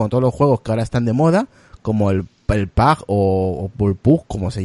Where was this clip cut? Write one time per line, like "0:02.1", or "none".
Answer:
none

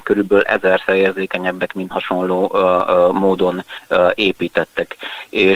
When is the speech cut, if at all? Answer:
0:01.9

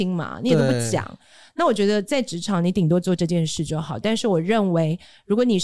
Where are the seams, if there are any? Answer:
none

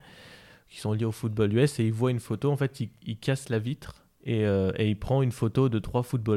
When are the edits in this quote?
none

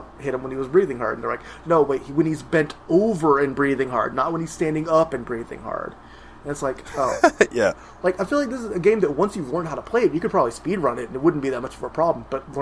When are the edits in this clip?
none

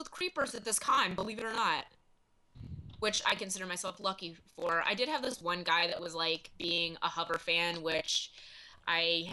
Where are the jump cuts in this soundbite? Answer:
none

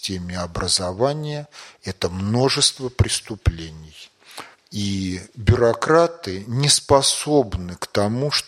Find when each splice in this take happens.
0:04.5

